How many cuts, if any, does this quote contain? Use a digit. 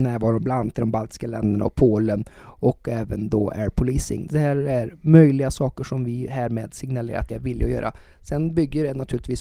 1